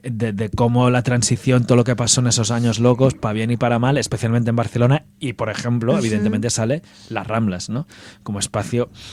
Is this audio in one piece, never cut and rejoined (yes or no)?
yes